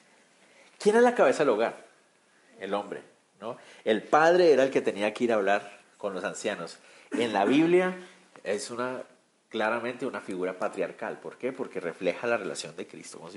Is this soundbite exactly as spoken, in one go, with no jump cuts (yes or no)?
yes